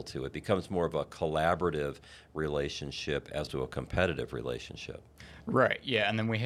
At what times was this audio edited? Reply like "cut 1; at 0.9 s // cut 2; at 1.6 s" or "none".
cut 1; at 3.5 s